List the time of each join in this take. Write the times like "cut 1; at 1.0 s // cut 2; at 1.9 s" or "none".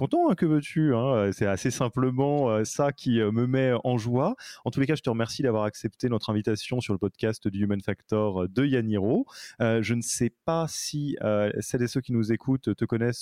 none